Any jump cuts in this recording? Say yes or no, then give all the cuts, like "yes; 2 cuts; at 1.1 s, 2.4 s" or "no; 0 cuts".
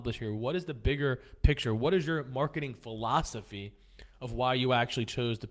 no; 0 cuts